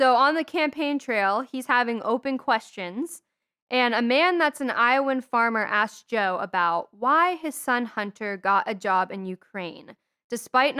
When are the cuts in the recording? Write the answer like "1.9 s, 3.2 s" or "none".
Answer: none